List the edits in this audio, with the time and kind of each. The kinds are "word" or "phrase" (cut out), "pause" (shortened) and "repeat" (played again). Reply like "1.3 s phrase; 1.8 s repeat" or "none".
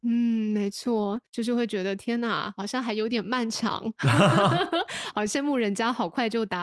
1.3 s pause